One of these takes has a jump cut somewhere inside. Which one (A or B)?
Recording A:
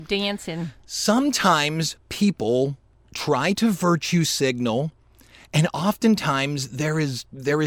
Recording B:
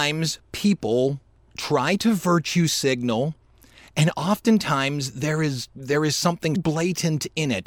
B